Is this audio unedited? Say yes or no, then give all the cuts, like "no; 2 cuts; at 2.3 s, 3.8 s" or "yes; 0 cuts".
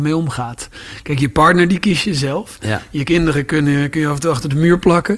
yes; 0 cuts